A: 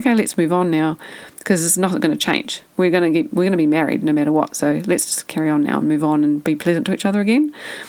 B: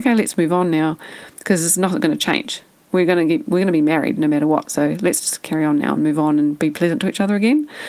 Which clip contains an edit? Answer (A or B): A